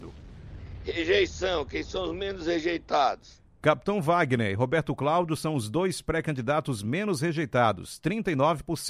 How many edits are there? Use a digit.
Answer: 0